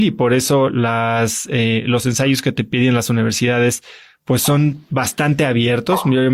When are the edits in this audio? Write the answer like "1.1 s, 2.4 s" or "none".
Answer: none